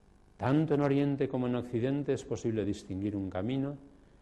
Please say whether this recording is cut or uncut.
uncut